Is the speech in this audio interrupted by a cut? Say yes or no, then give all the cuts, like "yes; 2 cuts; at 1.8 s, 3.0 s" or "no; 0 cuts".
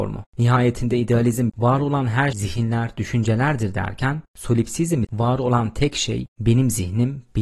yes; 3 cuts; at 1.5 s, 2.3 s, 5.0 s